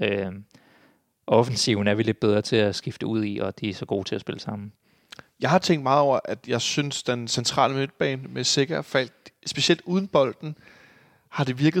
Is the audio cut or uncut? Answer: uncut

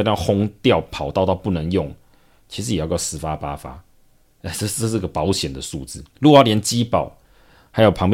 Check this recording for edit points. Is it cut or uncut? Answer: cut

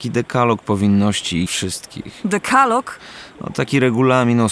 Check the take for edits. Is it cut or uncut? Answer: cut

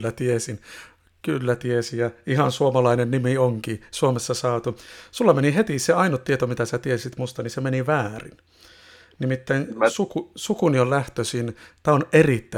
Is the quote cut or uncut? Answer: uncut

